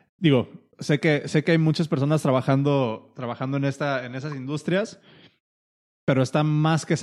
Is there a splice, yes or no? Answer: no